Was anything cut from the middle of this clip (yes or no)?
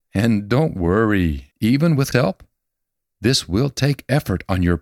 yes